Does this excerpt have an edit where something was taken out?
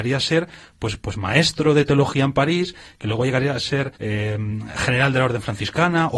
yes; 1 cut; at 4.0 s

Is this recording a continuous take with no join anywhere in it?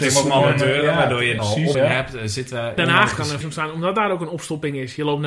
no; 4 cuts; at 1.4 s, 1.7 s, 2.8 s, 3.4 s

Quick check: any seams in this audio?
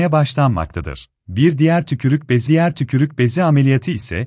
yes; 2 cuts; at 1.2 s, 2.5 s

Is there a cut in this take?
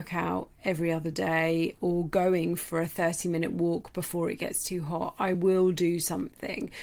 no; 0 cuts

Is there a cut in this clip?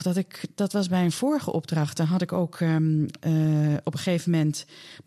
no; 0 cuts

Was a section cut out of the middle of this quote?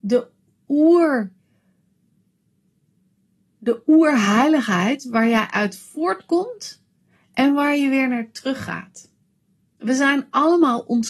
no; 0 cuts

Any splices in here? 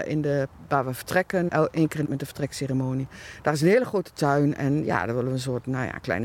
yes; 2 cuts; at 1.5 s, 2.0 s

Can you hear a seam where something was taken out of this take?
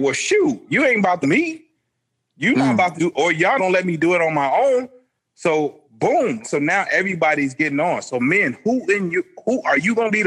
yes; 4 cuts; at 1.2 s, 3.0 s, 3.6 s, 6.4 s

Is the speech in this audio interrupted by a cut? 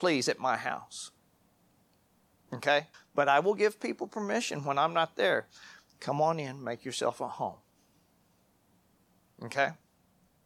yes; 1 cut; at 2.9 s

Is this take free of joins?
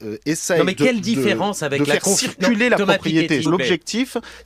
no; 1 cut; at 3.4 s

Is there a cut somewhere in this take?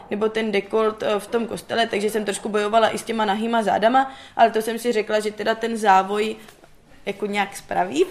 no; 0 cuts

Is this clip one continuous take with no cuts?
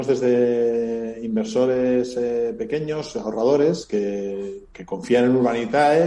yes; 0 cuts

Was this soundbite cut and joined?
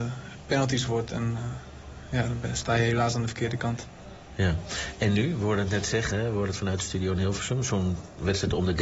no; 0 cuts

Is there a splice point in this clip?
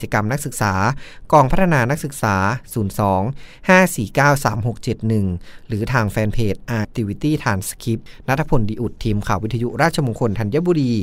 yes; 1 cut; at 6.8 s

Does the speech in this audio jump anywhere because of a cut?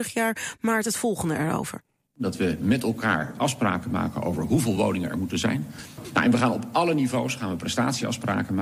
no; 0 cuts

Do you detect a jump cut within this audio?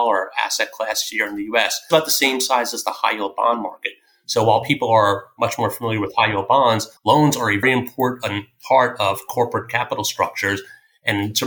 yes; 3 cuts; at 1.9 s, 7.0 s, 7.6 s

